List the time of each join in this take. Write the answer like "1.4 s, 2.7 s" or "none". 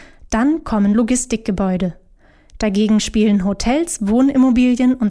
none